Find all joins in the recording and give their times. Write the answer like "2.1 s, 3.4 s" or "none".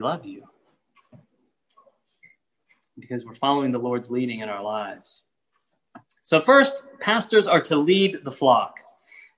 none